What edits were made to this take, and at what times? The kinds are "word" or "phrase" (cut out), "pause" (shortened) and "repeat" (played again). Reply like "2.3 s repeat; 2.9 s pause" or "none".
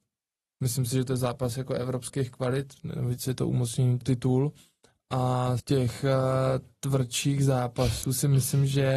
4.0 s phrase; 5.6 s word